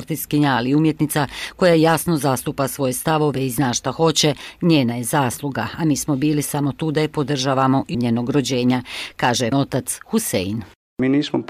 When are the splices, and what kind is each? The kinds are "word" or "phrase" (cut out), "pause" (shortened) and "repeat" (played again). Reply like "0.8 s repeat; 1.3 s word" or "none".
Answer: 7.9 s phrase; 9.5 s word